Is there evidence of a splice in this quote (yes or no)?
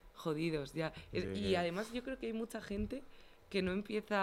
no